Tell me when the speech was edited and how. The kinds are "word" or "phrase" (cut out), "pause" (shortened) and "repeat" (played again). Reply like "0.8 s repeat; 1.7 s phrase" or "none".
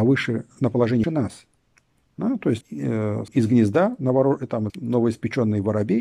1.0 s word; 2.6 s word; 3.3 s word; 4.7 s word